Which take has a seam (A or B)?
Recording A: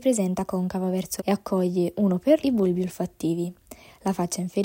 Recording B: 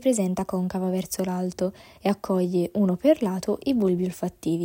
A